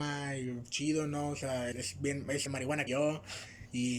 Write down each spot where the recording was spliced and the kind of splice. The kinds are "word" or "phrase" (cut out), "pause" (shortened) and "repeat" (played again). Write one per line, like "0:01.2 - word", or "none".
0:01.7 - word
0:02.5 - word
0:02.9 - word

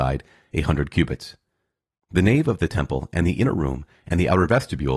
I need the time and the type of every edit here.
none

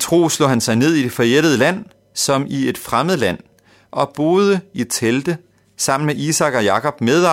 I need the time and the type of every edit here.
none

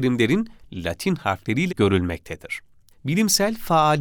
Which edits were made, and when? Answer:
0:01.7 - word
0:02.9 - pause

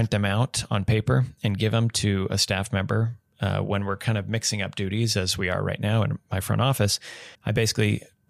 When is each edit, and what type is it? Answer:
0:07.3 - pause

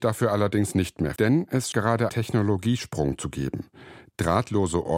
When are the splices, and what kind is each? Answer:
0:01.2 - word
0:01.7 - word
0:02.1 - word

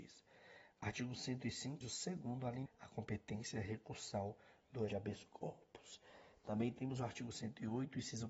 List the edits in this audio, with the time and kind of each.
0:01.8 - word
0:02.7 - word
0:04.9 - phrase

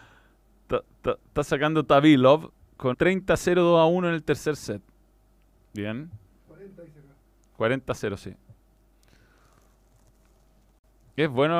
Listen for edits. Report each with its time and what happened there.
0:00.9 - repeat
0:02.9 - word
0:05.0 - pause

